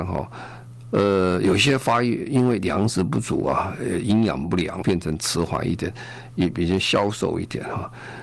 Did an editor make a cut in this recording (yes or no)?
yes